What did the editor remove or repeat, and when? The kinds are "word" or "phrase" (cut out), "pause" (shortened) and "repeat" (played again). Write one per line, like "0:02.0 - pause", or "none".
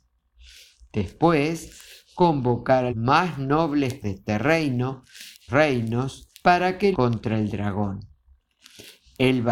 0:02.9 - word
0:04.0 - word
0:05.5 - phrase
0:06.3 - pause
0:06.9 - word